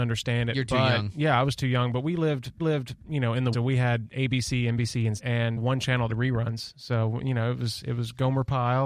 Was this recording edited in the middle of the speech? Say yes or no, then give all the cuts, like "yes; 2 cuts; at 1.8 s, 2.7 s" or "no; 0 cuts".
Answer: yes; 5 cuts; at 2.6 s, 3.5 s, 5.2 s, 5.6 s, 6.1 s